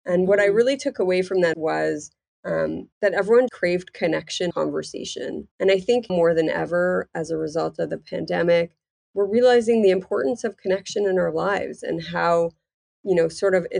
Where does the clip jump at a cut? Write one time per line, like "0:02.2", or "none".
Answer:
0:01.5
0:02.9
0:03.5
0:04.5
0:05.5
0:06.1